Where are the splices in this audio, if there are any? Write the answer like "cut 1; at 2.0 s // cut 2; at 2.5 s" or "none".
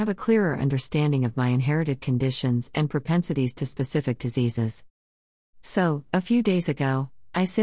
none